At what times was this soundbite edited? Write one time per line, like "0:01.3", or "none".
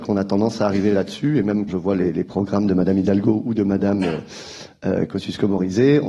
0:01.7